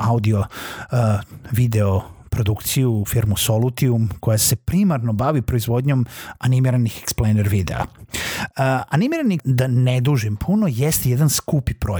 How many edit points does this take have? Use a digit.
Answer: 1